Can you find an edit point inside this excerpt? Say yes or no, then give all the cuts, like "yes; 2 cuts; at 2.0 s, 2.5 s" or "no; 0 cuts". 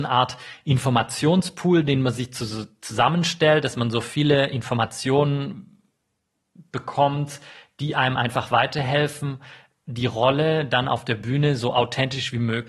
no; 0 cuts